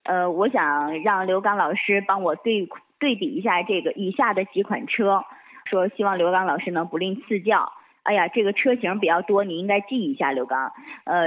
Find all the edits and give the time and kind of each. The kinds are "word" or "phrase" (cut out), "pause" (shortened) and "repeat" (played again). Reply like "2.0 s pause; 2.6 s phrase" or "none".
5.7 s word